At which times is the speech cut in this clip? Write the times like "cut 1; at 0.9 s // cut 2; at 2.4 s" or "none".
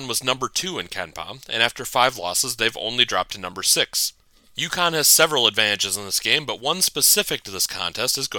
none